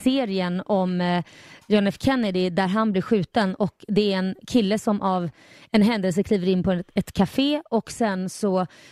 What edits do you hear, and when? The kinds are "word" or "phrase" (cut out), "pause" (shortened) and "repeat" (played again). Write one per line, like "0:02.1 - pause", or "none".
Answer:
none